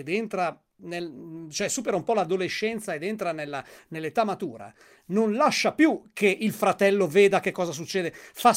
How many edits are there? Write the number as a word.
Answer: zero